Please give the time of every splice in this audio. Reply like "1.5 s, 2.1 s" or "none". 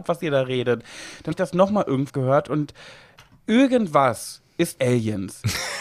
1.3 s, 2.1 s, 4.8 s

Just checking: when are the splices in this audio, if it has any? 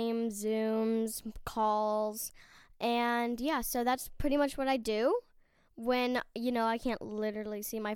none

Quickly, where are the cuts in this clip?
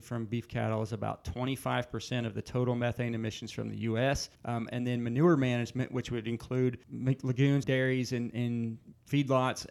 4.3 s, 7.6 s

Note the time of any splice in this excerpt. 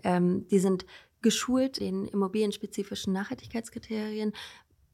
1.8 s

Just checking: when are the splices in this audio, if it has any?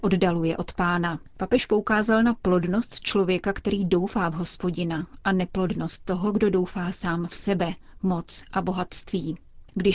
1.3 s

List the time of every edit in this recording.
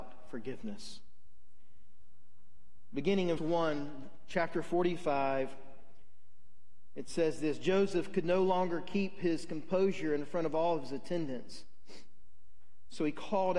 3.4 s

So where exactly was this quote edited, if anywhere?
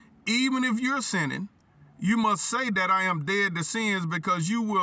1.6 s

